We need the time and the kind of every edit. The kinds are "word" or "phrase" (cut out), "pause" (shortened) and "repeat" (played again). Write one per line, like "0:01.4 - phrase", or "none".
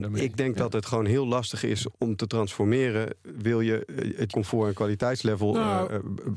0:01.9 - word
0:04.3 - word